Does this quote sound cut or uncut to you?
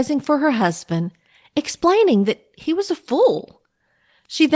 uncut